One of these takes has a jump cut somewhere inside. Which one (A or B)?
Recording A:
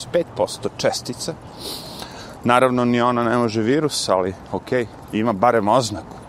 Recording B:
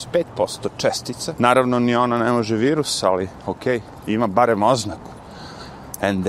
B